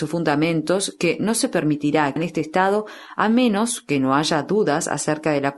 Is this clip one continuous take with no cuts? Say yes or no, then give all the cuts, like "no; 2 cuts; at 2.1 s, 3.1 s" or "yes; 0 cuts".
no; 1 cut; at 2.2 s